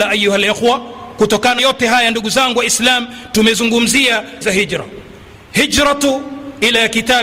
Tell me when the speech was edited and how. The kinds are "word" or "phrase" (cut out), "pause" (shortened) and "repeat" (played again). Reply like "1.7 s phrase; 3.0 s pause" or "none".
1.6 s word; 4.4 s word